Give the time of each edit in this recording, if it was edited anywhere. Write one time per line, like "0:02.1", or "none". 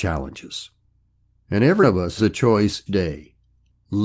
0:01.8
0:02.2
0:02.9